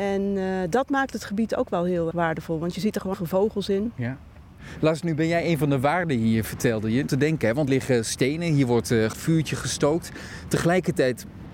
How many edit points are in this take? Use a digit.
5